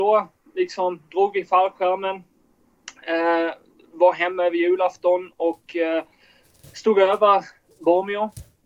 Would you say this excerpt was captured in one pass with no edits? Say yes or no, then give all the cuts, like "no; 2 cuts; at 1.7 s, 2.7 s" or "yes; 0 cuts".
yes; 0 cuts